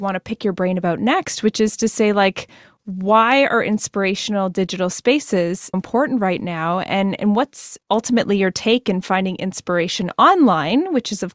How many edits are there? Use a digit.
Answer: 1